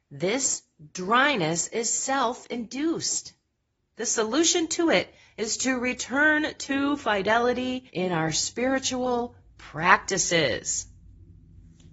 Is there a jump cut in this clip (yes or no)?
yes